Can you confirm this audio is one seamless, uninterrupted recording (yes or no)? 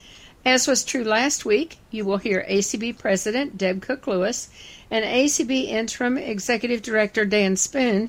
yes